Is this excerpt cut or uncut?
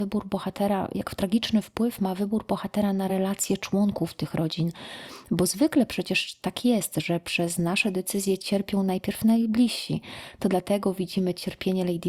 uncut